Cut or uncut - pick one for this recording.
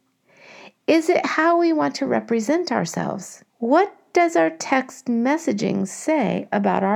cut